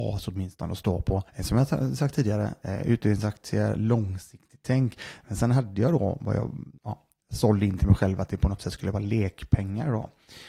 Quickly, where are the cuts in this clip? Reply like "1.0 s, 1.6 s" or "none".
1.3 s, 6.8 s